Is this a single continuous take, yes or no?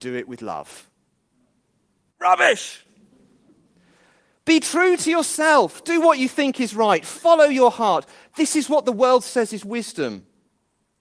yes